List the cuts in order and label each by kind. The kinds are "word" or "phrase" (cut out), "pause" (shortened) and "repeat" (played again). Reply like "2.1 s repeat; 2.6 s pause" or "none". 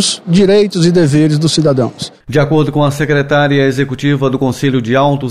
none